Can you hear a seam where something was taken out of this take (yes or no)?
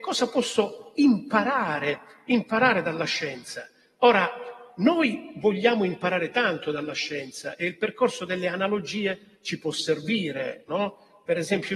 no